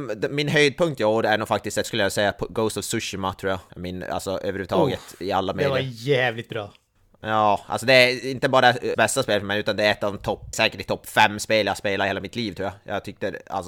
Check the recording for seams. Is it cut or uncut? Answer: cut